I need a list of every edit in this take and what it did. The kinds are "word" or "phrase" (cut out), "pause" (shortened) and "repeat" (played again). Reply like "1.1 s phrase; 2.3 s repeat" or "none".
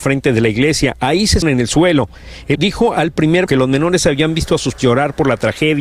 1.4 s word; 2.5 s word; 3.5 s word; 4.8 s word